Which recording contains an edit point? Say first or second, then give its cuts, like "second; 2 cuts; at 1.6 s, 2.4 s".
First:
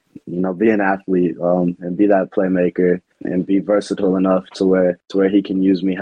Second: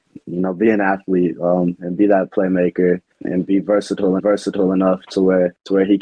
second; 1 cut; at 4.2 s